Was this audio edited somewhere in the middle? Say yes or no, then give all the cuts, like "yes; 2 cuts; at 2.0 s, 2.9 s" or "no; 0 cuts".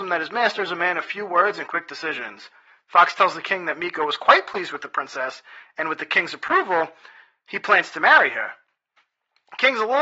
no; 0 cuts